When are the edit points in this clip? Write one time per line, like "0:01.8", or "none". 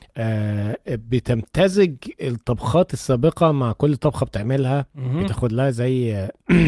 0:04.9